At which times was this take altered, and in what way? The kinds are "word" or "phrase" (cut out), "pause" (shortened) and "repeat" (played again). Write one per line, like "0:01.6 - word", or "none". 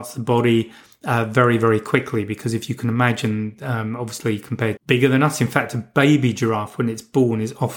0:04.8 - phrase